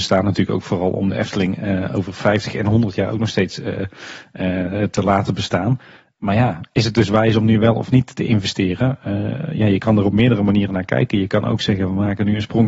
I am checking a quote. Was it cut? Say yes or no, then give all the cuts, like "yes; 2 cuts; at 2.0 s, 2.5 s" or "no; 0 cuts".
no; 0 cuts